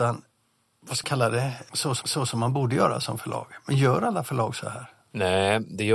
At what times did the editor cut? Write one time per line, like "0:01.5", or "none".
0:01.0
0:02.0